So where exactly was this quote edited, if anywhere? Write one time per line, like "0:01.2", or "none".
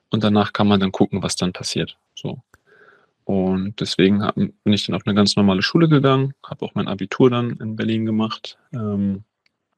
0:02.1

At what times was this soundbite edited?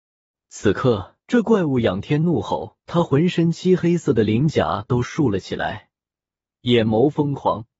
0:01.2
0:02.8

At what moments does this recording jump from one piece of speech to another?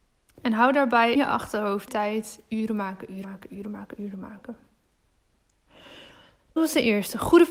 0:01.2
0:01.9
0:03.2
0:06.6

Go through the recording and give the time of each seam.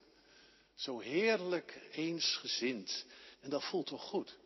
0:03.3

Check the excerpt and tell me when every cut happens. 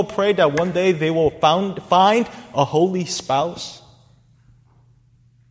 none

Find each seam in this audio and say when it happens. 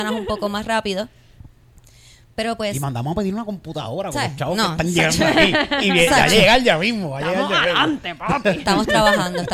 none

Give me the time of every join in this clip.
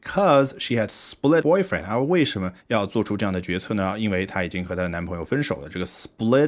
0:01.4
0:02.6

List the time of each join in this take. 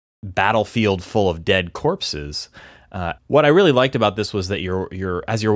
0:03.2

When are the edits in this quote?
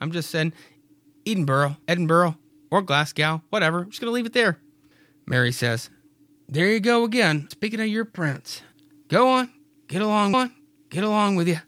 0:01.8
0:07.5
0:10.3

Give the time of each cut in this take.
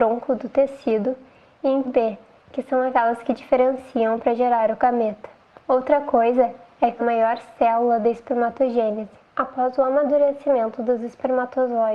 0:01.9
0:05.5
0:07.0
0:09.3

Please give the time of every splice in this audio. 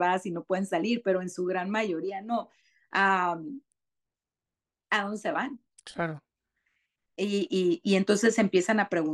none

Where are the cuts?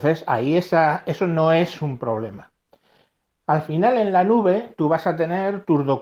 none

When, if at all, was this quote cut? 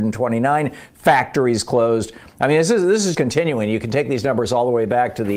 0:03.1

